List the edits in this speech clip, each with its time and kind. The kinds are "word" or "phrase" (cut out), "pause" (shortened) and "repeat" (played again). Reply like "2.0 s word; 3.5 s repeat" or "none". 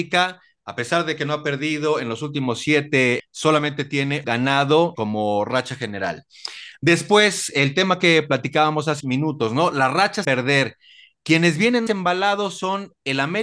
3.2 s word; 4.2 s word; 4.9 s word; 9.0 s word; 10.2 s word; 11.9 s word